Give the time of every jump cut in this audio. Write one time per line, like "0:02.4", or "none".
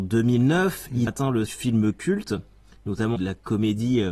0:01.1
0:01.5
0:03.2